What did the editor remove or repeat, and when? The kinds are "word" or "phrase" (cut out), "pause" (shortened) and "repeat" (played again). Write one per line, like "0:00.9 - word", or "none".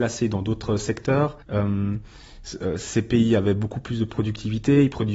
0:01.4 - pause